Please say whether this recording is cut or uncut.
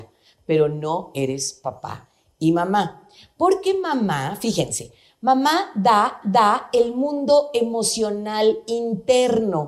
cut